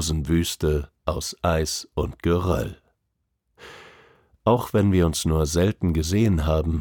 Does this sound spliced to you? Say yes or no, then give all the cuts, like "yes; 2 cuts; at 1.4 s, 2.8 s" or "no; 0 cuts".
no; 0 cuts